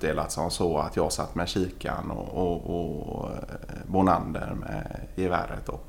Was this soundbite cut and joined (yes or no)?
yes